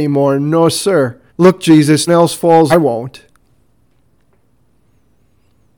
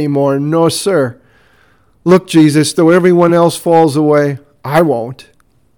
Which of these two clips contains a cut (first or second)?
first